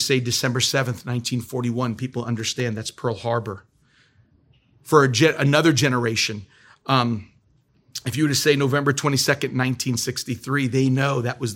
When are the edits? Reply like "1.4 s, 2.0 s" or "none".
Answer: none